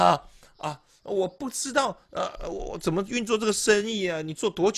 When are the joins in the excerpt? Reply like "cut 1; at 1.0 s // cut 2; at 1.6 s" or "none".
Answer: none